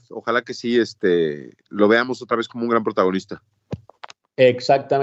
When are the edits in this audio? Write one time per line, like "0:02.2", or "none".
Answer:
none